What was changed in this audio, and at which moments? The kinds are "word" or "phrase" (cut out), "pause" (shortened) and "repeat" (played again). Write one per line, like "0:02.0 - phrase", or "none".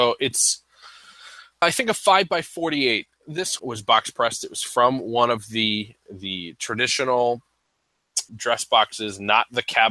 0:01.6 - word
0:03.6 - phrase
0:06.0 - word
0:08.3 - word